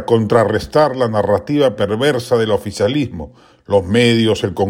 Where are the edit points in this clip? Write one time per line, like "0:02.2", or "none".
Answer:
none